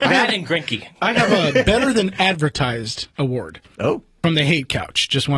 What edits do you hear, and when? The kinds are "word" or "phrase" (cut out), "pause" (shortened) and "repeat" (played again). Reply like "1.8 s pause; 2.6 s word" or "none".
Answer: none